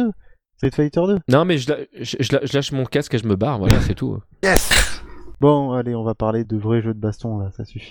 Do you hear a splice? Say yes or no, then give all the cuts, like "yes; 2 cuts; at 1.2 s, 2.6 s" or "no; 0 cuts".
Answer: yes; 1 cut; at 6.4 s